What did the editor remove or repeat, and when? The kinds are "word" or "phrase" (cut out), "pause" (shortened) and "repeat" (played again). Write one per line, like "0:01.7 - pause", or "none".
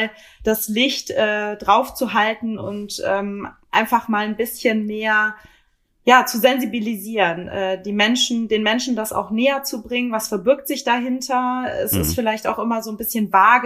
none